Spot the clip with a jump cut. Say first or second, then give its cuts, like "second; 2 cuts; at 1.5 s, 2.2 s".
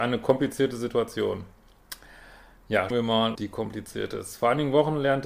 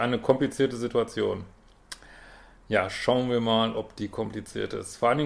first; 2 cuts; at 2.9 s, 3.4 s